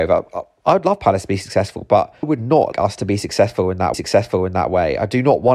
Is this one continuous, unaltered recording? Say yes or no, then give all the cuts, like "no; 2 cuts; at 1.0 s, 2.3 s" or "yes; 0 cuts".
no; 3 cuts; at 2.2 s, 2.7 s, 3.9 s